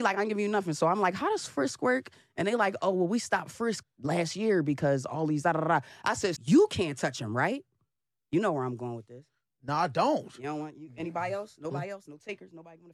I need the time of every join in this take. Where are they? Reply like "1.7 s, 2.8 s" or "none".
3.8 s, 6.4 s